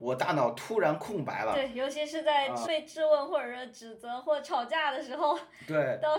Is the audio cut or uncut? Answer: cut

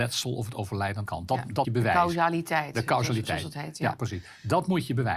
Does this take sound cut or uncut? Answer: cut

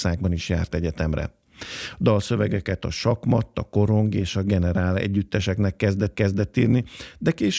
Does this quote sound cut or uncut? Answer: cut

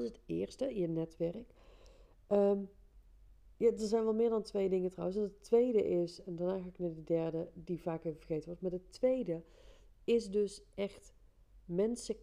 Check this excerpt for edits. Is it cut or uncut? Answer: uncut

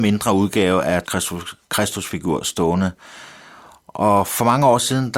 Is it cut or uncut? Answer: cut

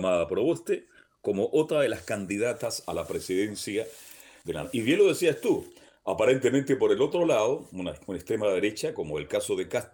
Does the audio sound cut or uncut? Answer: uncut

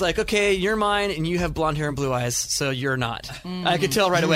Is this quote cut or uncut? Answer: uncut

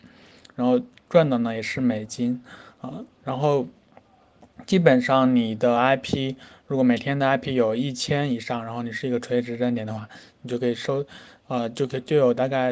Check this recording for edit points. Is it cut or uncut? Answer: uncut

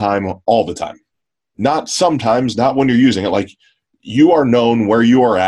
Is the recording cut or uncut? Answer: uncut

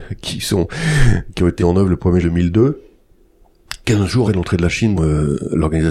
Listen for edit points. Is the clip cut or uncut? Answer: cut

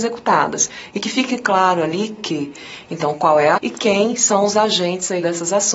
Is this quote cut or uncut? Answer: cut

